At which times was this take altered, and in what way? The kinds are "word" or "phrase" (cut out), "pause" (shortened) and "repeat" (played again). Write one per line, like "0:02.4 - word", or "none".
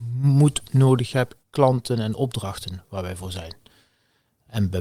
0:01.4 - phrase